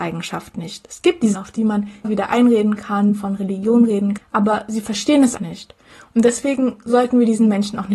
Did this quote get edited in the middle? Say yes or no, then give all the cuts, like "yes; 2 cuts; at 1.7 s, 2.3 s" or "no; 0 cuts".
yes; 4 cuts; at 1.3 s, 2.0 s, 4.2 s, 5.4 s